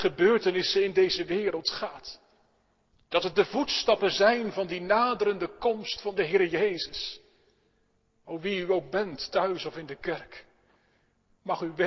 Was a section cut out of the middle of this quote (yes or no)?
no